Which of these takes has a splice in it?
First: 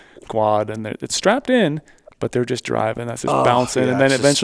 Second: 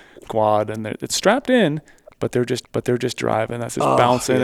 second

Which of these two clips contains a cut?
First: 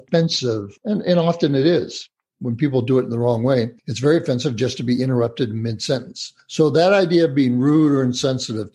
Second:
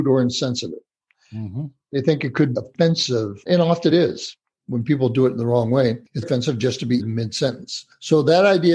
second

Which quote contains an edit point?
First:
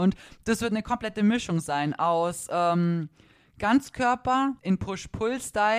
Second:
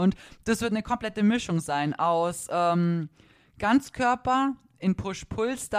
first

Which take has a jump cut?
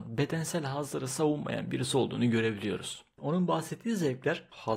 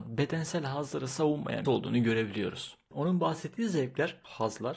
second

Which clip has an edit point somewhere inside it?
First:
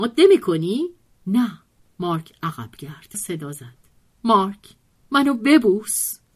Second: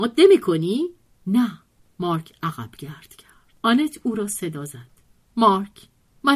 first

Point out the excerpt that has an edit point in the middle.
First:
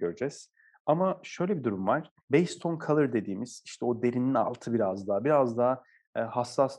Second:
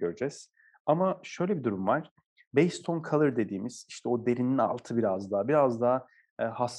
first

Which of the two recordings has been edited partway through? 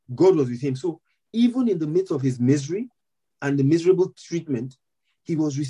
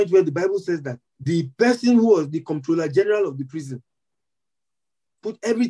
second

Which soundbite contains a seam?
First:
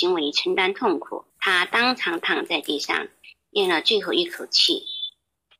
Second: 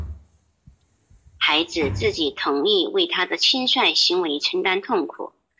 first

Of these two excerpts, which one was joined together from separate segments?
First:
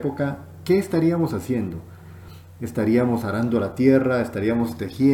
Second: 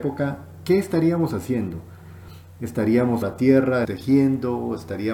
second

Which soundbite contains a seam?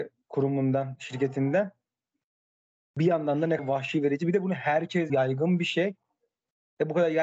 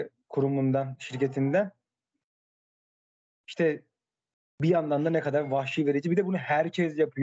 first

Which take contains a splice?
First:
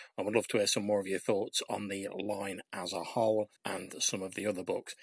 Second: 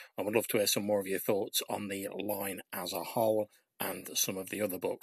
first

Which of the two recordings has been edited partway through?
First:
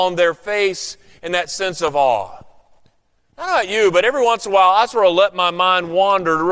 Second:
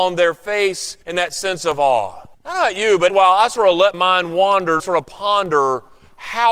second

